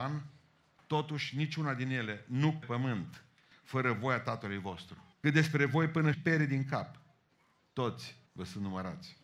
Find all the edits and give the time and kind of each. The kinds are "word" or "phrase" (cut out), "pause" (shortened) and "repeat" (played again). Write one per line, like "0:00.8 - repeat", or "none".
0:02.6 - phrase
0:05.1 - pause
0:06.1 - word
0:08.3 - pause